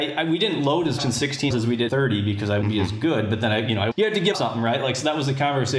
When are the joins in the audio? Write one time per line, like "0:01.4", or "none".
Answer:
0:01.0
0:01.5
0:01.9
0:02.6
0:03.9
0:04.3